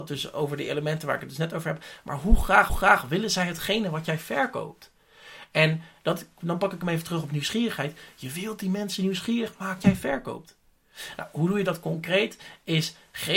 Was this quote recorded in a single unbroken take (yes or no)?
no